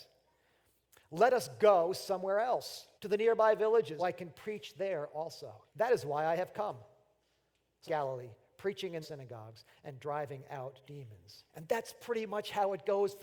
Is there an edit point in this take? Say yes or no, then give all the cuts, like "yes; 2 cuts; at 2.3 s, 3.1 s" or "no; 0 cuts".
yes; 6 cuts; at 3.0 s, 4.0 s, 5.7 s, 7.9 s, 9.0 s, 11.5 s